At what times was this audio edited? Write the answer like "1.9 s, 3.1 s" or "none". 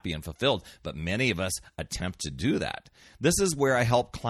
none

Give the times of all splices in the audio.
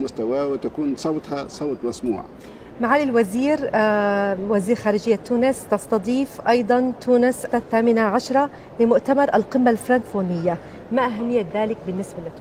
7.5 s

